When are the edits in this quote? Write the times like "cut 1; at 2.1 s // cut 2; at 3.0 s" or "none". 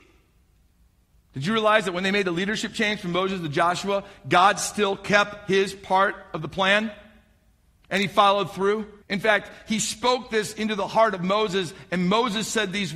cut 1; at 9.0 s